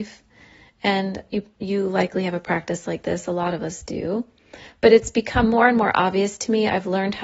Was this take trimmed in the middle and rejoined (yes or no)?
no